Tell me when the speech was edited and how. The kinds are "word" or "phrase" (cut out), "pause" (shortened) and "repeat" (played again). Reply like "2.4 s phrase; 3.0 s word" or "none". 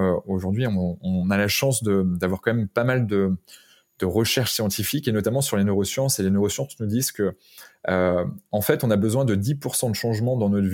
none